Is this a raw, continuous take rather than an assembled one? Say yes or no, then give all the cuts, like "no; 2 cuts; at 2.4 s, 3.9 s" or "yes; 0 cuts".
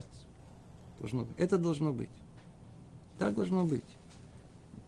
no; 1 cut; at 3.1 s